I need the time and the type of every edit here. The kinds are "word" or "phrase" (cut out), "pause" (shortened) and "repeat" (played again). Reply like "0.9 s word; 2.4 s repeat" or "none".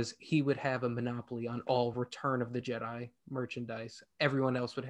none